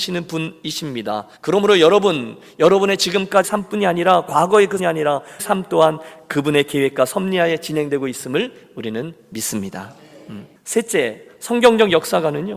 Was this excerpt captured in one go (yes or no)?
no